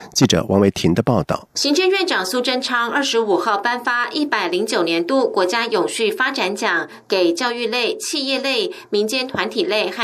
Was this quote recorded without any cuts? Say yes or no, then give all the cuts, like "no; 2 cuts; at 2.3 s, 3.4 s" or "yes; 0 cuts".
no; 1 cut; at 1.5 s